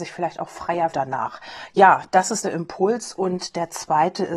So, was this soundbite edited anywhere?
yes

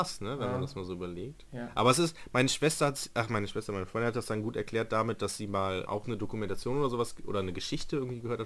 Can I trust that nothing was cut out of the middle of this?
no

